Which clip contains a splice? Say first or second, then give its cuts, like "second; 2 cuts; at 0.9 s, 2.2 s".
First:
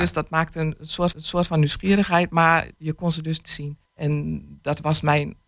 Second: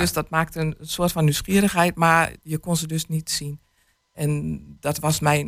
first; 3 cuts; at 1.1 s, 3.4 s, 3.9 s